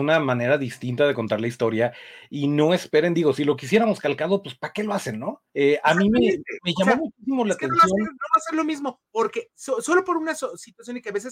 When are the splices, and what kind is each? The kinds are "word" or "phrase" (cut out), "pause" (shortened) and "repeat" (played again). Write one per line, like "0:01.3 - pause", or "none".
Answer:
0:05.5 - pause
0:09.1 - pause